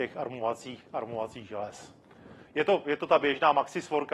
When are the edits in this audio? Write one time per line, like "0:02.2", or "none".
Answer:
none